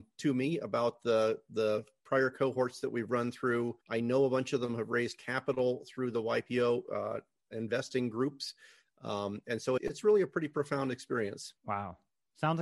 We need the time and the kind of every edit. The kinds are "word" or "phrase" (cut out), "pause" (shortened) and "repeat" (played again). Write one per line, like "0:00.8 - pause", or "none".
0:03.8 - pause
0:09.8 - word
0:11.6 - pause